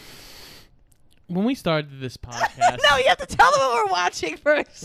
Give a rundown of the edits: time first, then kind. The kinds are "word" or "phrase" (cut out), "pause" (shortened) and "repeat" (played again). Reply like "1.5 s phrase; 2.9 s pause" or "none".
none

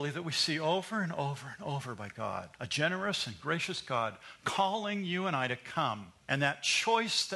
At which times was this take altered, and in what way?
2.5 s pause; 6.2 s pause

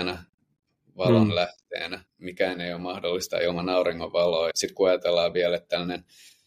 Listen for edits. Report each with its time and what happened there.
2.1 s pause; 4.5 s word

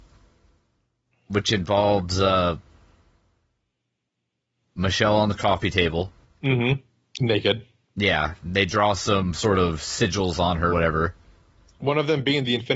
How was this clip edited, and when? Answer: 6.2 s pause; 10.7 s word

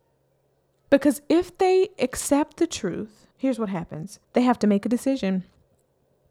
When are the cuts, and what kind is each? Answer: 3.3 s pause; 4.2 s pause

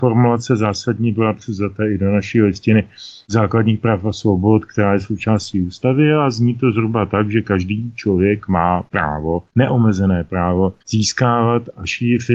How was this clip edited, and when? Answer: 10.8 s pause

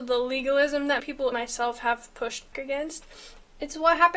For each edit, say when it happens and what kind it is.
1.0 s word; 1.3 s word; 2.5 s word

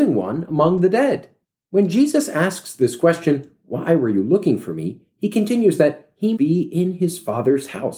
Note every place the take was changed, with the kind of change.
6.4 s word

